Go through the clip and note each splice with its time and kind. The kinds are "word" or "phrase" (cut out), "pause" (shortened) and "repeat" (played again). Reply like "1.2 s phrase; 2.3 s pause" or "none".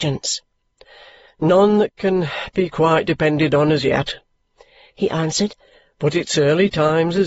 none